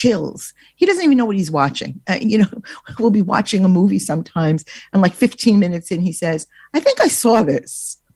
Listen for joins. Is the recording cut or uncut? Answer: uncut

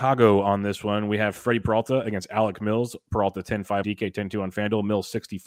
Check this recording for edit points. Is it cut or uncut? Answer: cut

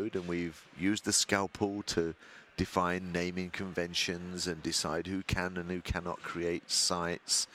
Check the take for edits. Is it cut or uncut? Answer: uncut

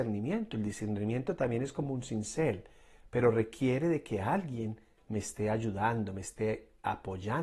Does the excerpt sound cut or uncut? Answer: uncut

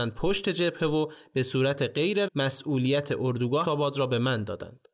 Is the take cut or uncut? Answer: cut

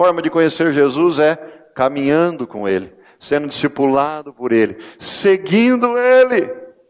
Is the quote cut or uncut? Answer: uncut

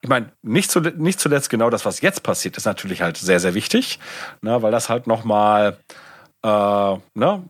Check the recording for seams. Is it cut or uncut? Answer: uncut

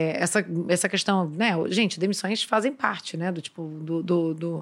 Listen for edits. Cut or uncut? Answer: uncut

